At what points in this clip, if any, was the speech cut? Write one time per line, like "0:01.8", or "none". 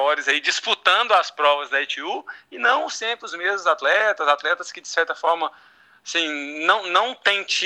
none